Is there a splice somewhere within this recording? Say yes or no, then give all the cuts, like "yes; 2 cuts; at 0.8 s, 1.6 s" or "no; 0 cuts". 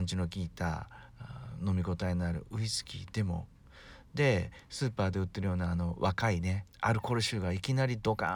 yes; 1 cut; at 6.7 s